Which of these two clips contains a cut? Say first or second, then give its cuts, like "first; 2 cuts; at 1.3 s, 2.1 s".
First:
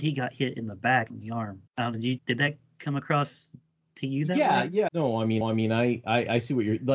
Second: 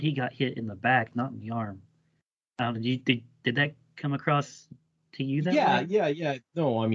first; 5 cuts; at 1.1 s, 1.7 s, 2.2 s, 4.9 s, 5.4 s